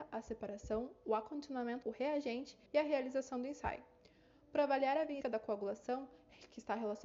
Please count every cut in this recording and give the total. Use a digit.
3